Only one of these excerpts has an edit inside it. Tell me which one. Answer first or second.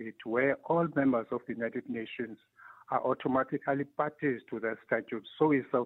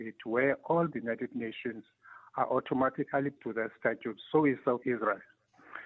second